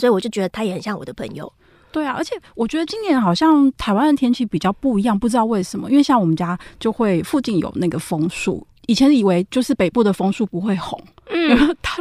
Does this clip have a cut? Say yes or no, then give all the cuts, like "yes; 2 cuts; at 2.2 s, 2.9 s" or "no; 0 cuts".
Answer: no; 0 cuts